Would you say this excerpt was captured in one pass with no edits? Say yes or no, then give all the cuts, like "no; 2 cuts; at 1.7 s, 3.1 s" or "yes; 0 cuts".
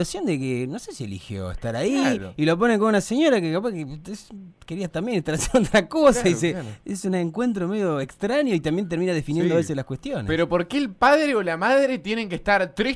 yes; 0 cuts